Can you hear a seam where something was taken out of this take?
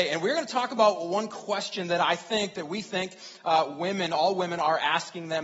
no; 0 cuts

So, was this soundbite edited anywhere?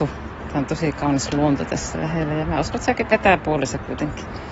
no; 0 cuts

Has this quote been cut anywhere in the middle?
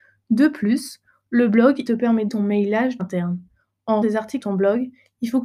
yes; 5 cuts; at 1.9 s, 2.3 s, 3.0 s, 4.0 s, 4.4 s

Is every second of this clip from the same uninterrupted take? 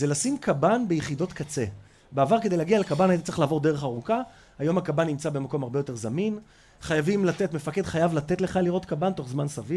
yes; 0 cuts

